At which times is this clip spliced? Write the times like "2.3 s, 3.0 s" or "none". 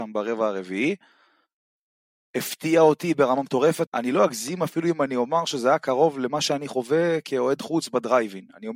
3.9 s